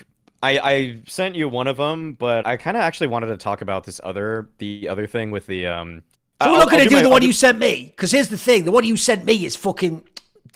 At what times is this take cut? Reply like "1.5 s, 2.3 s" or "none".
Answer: 2.4 s, 6.1 s